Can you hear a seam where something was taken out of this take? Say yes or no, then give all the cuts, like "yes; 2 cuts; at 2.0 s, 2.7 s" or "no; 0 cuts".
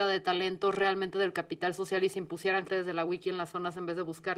yes; 1 cut; at 2.7 s